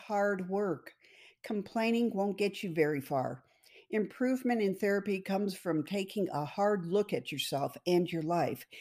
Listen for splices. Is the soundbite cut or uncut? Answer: uncut